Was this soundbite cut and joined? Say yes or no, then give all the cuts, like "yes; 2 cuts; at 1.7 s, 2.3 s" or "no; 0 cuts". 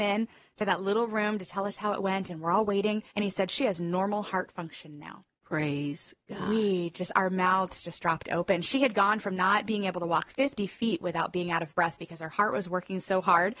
yes; 2 cuts; at 3.1 s, 5.4 s